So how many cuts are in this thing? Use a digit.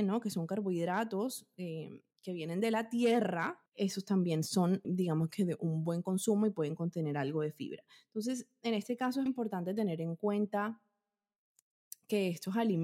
4